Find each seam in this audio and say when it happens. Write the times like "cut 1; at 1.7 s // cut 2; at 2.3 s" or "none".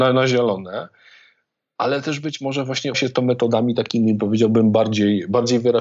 cut 1; at 2.9 s